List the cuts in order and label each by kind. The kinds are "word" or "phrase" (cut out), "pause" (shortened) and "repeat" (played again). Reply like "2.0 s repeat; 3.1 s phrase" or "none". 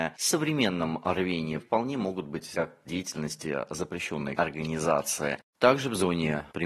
1.6 s word; 2.5 s word; 2.9 s word; 4.4 s word